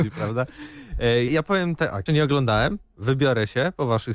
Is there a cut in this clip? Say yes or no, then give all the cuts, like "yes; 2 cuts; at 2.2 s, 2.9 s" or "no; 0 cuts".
yes; 2 cuts; at 1.3 s, 2.1 s